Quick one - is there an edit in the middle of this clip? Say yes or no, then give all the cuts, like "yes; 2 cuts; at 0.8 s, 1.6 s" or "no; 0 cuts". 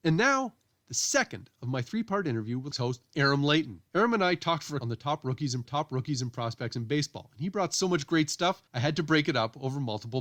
yes; 5 cuts; at 2.7 s, 3.9 s, 4.8 s, 5.6 s, 8.7 s